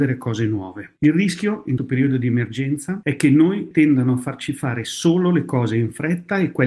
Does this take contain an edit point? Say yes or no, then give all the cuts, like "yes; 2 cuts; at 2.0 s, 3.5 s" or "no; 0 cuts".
yes; 2 cuts; at 1.8 s, 3.7 s